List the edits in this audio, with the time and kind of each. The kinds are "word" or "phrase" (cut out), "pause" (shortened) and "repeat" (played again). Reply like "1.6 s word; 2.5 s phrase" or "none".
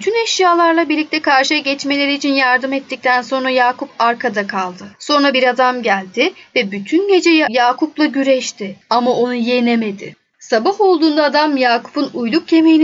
4.9 s pause